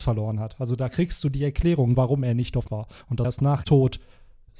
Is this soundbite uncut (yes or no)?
no